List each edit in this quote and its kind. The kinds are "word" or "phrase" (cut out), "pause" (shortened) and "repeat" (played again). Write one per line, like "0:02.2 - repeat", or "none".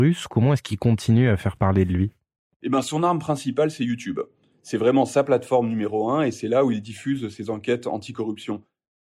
none